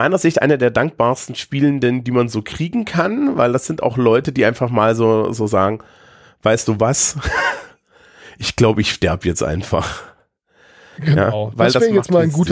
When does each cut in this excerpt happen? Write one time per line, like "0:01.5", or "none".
none